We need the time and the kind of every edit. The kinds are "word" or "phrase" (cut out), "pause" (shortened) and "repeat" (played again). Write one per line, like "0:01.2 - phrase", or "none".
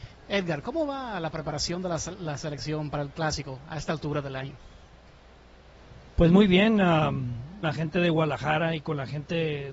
0:07.6 - phrase